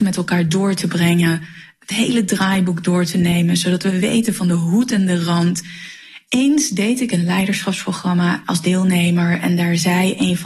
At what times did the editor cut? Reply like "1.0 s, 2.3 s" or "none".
8.4 s

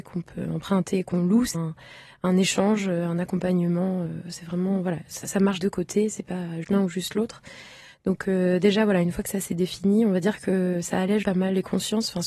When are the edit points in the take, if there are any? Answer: 1.5 s, 5.2 s, 5.6 s, 6.6 s, 11.2 s

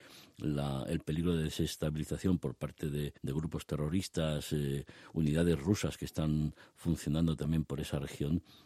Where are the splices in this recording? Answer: 3.2 s

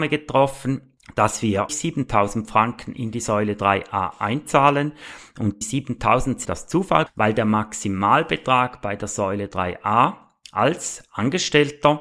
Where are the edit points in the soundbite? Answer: 1.7 s, 5.6 s, 6.5 s, 7.1 s

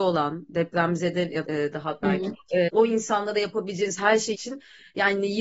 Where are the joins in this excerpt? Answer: 1.4 s, 2.0 s, 2.3 s, 2.7 s, 4.3 s

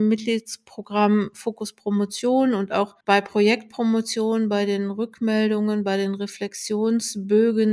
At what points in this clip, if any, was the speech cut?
3.0 s

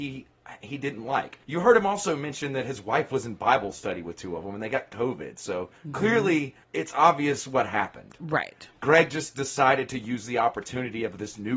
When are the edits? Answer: 1.4 s, 5.8 s, 6.6 s

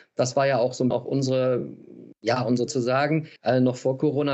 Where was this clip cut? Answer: 0.9 s, 2.7 s, 3.4 s

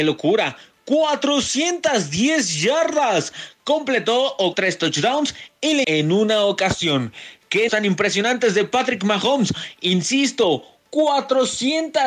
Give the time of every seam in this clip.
4.5 s, 5.8 s, 7.7 s

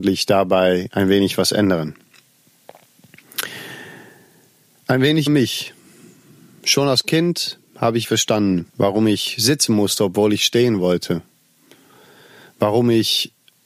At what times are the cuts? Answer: 5.3 s, 8.0 s, 8.7 s

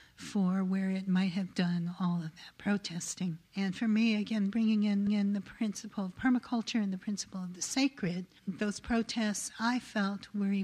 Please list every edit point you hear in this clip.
1.5 s, 3.5 s, 5.1 s, 8.4 s

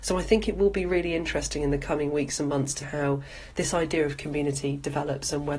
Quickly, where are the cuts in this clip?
2.8 s

